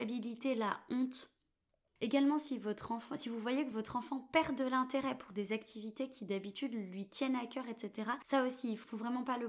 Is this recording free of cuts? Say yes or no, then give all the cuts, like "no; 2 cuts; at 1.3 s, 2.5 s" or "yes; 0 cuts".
yes; 0 cuts